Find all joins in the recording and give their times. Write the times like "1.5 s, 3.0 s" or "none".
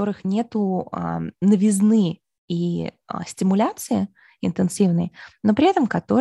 none